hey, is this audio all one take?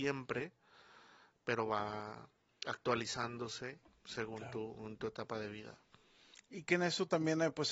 yes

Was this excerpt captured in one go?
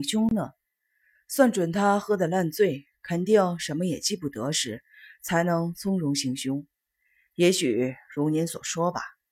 yes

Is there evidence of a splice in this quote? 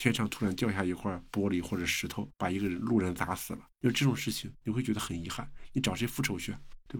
yes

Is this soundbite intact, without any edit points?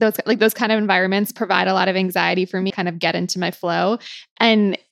no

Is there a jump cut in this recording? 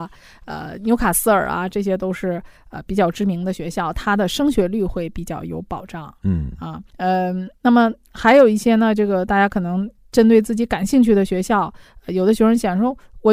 yes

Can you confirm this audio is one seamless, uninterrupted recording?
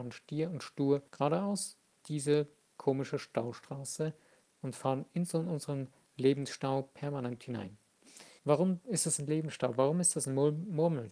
no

